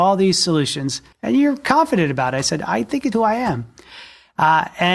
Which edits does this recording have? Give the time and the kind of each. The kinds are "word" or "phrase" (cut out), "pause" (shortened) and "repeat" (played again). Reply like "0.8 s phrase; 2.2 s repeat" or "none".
1.1 s pause; 3.1 s word